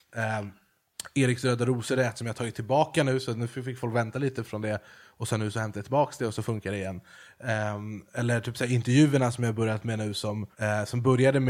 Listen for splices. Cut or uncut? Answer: cut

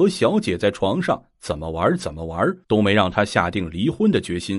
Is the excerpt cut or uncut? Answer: cut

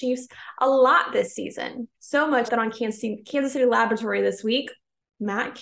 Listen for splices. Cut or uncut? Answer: cut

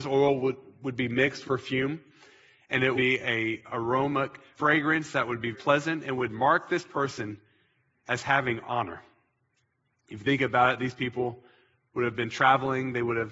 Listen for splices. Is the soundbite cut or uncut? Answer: cut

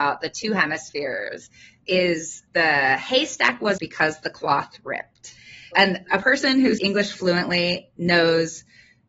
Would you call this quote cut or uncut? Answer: cut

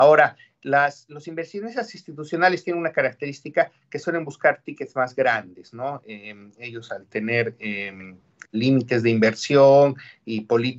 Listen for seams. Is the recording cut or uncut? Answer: uncut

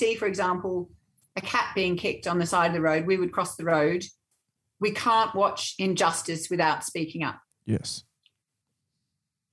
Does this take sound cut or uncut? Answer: uncut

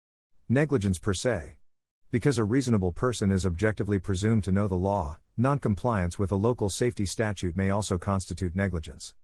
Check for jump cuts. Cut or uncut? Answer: uncut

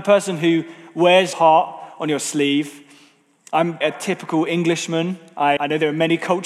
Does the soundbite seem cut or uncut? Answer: cut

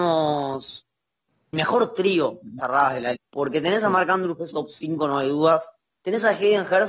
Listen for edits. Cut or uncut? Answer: cut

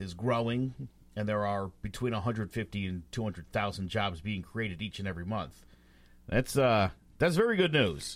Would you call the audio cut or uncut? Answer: uncut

